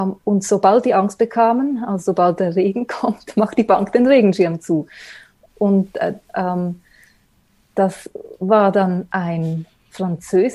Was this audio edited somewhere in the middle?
no; 0 cuts

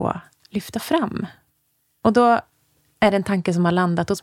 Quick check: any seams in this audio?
no; 0 cuts

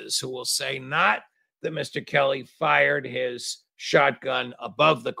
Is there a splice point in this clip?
no; 0 cuts

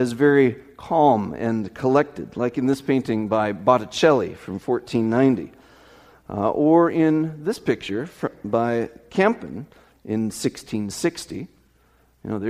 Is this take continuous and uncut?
yes; 0 cuts

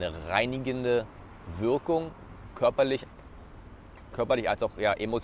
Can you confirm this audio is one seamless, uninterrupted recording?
no; 1 cut; at 4.1 s

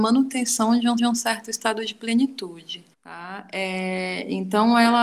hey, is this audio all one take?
no; 2 cuts; at 1.0 s, 2.9 s

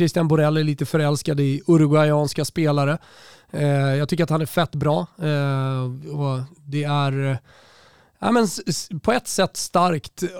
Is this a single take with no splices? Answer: yes; 0 cuts

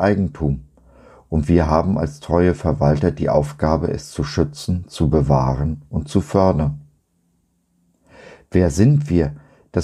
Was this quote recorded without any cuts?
yes; 0 cuts

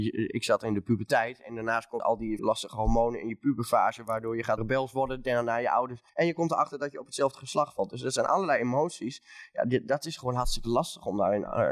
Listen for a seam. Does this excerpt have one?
yes; 4 cuts; at 2.0 s, 2.4 s, 4.6 s, 6.1 s

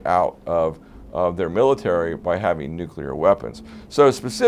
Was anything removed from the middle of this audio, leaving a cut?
no; 0 cuts

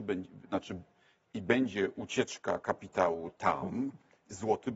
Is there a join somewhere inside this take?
no; 0 cuts

